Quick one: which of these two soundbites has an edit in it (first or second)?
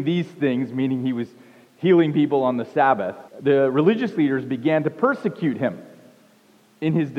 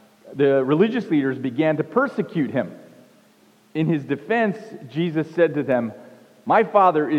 first